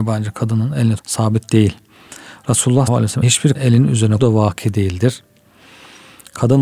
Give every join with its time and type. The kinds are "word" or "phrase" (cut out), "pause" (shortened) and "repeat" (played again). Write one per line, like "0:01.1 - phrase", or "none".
0:01.0 - word
0:02.9 - word
0:03.2 - word
0:03.5 - word
0:04.2 - word

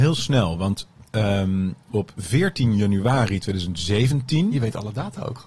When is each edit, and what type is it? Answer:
none

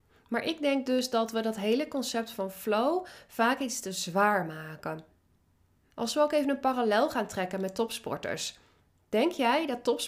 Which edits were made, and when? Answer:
none

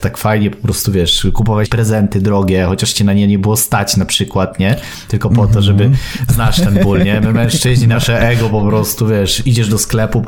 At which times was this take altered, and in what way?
0:01.7 - word

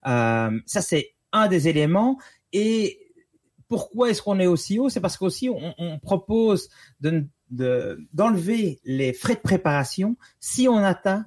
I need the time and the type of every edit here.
none

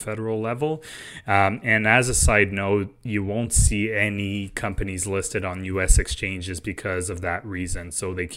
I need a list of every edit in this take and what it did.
none

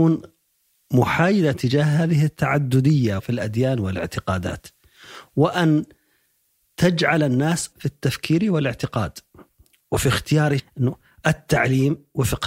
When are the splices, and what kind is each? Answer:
0:01.5 - word
0:03.2 - word
0:07.7 - word
0:10.6 - word

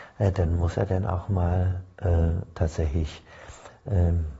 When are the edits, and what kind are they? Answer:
none

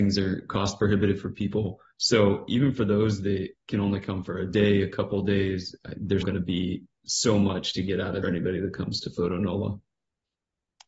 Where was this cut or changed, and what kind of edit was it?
0:01.9 - pause
0:06.2 - word
0:08.2 - phrase

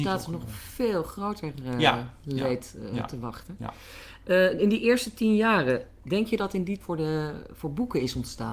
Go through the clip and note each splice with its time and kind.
0:06.8 - phrase

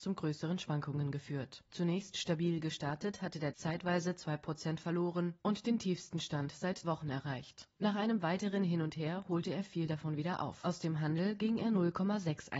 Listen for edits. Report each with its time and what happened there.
0:03.5 - word
0:06.8 - word

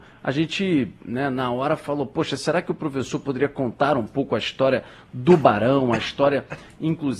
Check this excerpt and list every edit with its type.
none

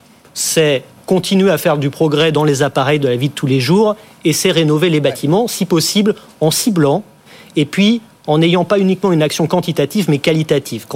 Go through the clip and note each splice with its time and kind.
none

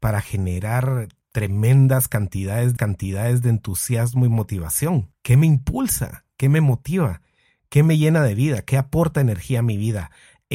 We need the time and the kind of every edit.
0:02.8 - repeat

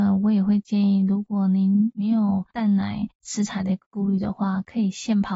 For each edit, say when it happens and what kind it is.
0:03.1 - pause

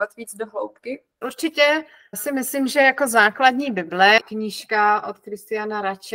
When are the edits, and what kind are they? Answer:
0:04.2 - word

